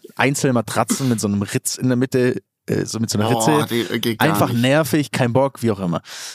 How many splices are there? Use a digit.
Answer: 0